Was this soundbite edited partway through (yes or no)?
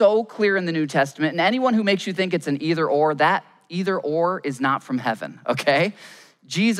no